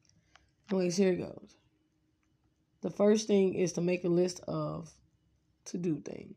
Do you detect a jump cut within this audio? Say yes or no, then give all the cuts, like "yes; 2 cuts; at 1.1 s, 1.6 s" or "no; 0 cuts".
no; 0 cuts